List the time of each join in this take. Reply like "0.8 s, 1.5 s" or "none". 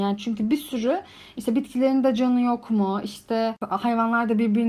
none

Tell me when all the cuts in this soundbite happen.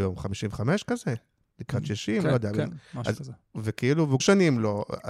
4.2 s

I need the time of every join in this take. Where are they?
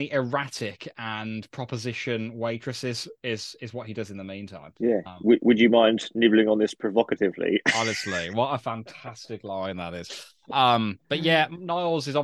4.8 s

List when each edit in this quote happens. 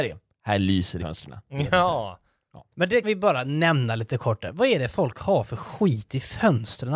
1.0 s, 2.7 s, 3.0 s

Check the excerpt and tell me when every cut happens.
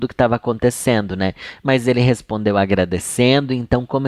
none

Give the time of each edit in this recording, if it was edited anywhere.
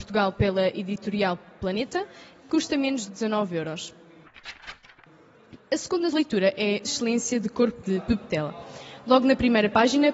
2.4 s, 3.1 s, 6.1 s, 6.8 s, 7.8 s

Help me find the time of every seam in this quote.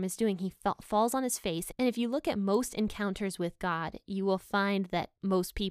none

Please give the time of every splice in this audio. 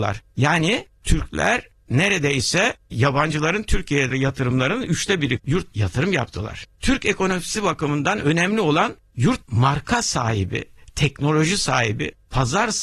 4.1 s, 5.4 s, 5.7 s, 9.4 s

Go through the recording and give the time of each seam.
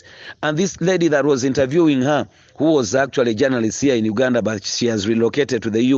none

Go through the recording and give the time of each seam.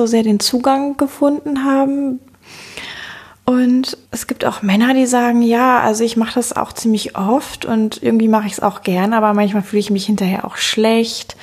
4.1 s

